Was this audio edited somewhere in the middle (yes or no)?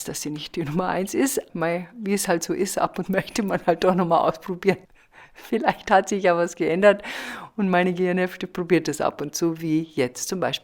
yes